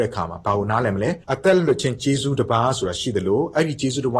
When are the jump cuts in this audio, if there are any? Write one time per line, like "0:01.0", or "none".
0:01.2